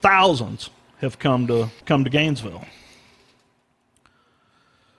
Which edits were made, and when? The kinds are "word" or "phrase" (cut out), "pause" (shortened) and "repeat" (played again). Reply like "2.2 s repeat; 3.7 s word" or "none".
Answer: 1.8 s pause